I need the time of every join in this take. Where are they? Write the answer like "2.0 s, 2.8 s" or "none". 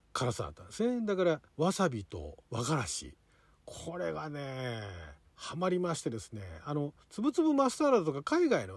1.5 s, 2.4 s, 5.3 s, 7.0 s